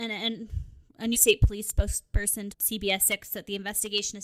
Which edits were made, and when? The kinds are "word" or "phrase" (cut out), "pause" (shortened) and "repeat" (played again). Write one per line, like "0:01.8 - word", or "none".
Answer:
0:01.1 - word
0:02.5 - word